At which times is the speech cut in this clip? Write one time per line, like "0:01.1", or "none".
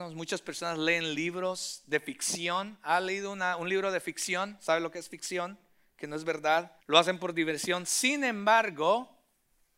0:06.8